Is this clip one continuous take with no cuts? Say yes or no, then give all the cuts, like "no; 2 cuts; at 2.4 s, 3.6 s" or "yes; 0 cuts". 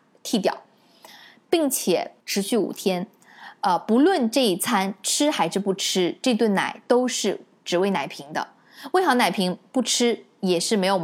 no; 1 cut; at 2.2 s